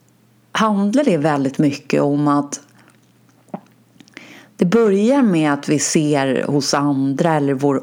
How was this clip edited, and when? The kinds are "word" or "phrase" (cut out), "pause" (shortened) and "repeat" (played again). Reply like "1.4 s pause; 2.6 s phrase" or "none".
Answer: none